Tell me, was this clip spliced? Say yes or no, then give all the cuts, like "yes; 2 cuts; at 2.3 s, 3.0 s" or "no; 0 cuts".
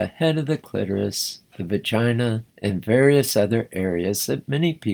yes; 1 cut; at 2.5 s